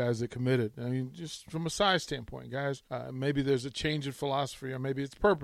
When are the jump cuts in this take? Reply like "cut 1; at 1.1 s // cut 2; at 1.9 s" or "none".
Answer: cut 1; at 2.9 s